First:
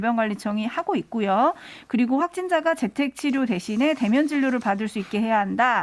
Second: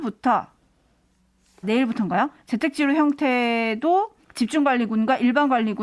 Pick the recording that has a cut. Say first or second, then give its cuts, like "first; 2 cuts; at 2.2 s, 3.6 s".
second; 2 cuts; at 1.6 s, 4.2 s